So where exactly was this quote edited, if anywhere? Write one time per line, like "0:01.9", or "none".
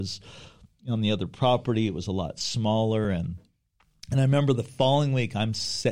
none